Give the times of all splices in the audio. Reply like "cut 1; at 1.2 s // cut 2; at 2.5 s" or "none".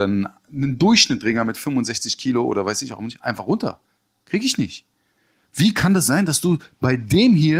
none